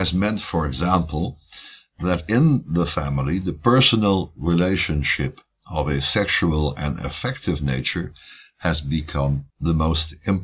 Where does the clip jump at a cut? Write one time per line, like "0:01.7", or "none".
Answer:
0:09.5